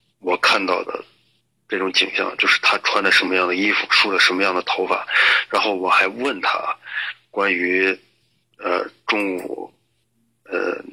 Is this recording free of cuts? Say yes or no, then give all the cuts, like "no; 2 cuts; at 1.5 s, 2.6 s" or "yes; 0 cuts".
yes; 0 cuts